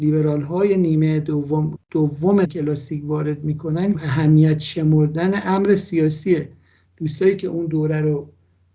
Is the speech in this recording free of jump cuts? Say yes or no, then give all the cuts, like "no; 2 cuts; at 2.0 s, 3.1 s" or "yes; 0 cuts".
no; 3 cuts; at 1.8 s, 2.4 s, 3.9 s